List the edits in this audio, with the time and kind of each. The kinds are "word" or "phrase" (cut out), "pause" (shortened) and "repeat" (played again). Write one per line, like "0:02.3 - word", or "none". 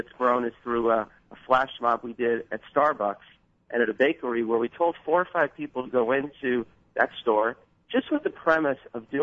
none